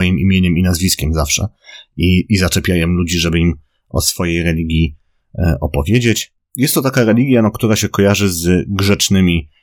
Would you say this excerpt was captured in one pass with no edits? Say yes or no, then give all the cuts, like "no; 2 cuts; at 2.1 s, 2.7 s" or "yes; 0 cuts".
yes; 0 cuts